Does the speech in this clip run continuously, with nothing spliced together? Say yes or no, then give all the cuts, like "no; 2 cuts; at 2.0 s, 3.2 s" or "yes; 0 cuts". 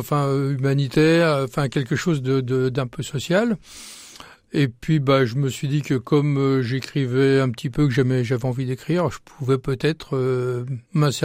yes; 0 cuts